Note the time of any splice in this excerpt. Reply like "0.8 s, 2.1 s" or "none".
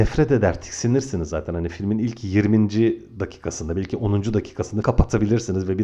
4.8 s